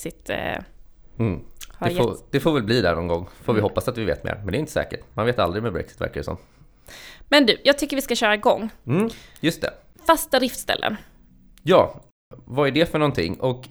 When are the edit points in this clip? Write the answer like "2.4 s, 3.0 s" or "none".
9.9 s